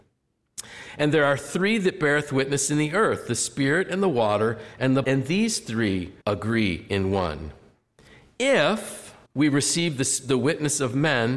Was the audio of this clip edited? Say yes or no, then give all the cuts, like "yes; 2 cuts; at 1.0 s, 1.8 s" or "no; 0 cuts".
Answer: yes; 3 cuts; at 5.0 s, 6.2 s, 9.3 s